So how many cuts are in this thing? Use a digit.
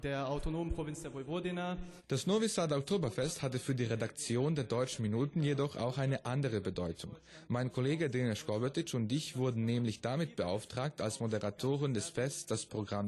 1